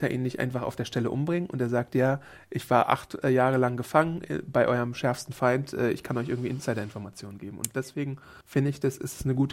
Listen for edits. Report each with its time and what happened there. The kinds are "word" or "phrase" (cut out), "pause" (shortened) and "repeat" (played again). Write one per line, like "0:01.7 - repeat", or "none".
0:08.4 - pause